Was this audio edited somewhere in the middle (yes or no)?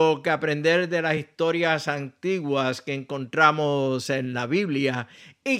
no